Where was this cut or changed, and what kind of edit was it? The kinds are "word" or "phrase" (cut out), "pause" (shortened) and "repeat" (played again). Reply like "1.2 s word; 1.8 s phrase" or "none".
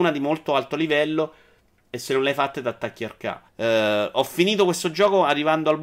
3.5 s pause